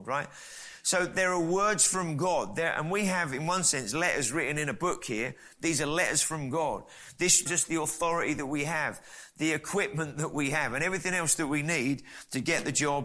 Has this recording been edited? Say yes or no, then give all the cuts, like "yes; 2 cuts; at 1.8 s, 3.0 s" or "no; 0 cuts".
yes; 1 cut; at 7.5 s